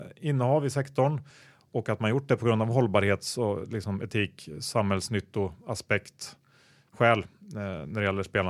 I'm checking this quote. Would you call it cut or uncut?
uncut